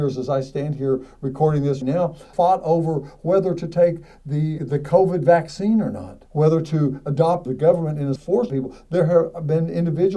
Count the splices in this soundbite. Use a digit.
7